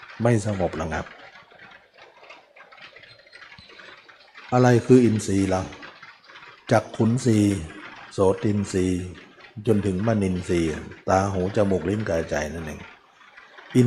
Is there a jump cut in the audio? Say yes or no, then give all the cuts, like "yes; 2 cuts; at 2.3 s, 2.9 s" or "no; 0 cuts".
yes; 1 cut; at 11.0 s